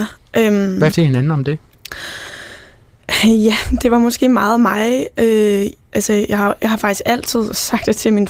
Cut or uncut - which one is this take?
cut